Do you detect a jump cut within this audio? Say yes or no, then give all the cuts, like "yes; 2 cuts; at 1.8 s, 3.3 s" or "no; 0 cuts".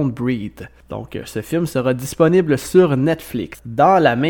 no; 0 cuts